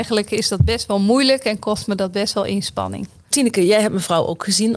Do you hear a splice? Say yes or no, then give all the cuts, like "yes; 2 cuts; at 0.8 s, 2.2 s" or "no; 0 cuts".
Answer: no; 0 cuts